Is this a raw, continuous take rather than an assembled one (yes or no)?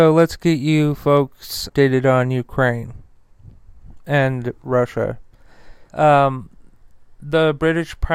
no